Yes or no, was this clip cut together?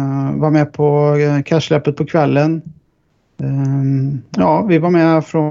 yes